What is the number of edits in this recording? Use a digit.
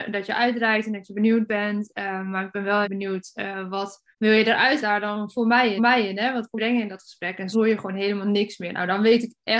6